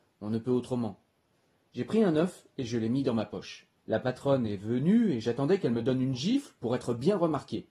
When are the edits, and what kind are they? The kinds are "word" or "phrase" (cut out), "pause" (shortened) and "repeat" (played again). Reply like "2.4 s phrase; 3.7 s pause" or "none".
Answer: 3.8 s pause